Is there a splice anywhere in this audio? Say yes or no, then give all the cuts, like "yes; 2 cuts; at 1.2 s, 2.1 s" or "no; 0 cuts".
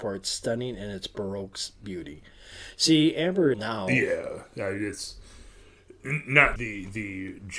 yes; 2 cuts; at 3.5 s, 6.6 s